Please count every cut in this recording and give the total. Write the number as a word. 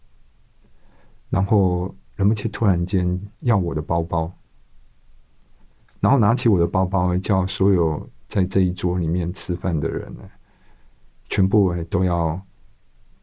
one